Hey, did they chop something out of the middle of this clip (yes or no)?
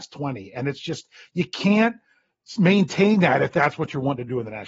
no